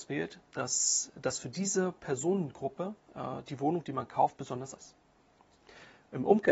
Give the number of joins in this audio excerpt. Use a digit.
2